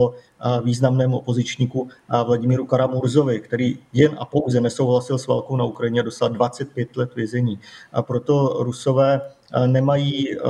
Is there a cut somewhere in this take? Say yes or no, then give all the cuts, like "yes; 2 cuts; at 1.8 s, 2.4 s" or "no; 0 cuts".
no; 0 cuts